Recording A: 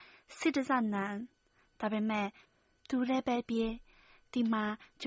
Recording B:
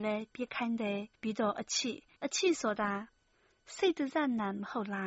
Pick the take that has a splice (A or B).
B